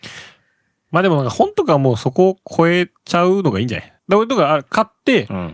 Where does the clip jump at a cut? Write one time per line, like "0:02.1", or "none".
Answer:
0:03.0
0:04.0